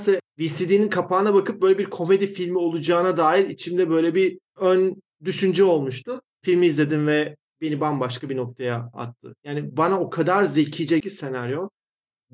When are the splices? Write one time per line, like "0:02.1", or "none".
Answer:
0:11.0